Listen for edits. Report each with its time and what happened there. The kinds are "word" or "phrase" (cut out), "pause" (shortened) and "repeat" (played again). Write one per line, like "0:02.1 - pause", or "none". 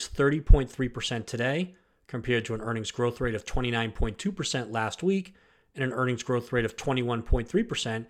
none